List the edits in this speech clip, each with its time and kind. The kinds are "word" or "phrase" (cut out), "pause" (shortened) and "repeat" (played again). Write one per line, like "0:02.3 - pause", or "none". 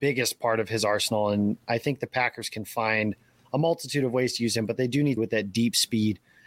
0:05.2 - word